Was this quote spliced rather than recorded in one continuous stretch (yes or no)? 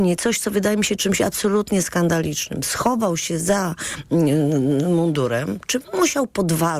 no